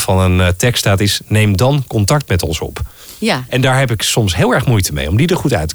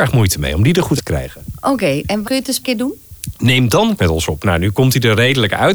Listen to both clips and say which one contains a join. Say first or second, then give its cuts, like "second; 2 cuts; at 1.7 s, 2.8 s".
second; 4 cuts; at 1.0 s, 2.2 s, 2.6 s, 4.0 s